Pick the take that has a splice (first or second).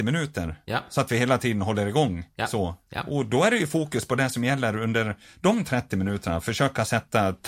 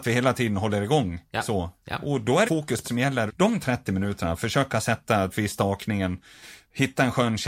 second